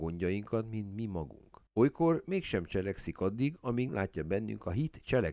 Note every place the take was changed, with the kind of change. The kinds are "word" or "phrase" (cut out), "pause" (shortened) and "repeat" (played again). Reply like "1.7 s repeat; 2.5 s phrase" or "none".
1.7 s pause; 3.9 s word